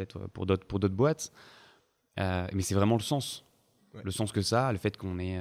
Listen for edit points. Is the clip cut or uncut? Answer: uncut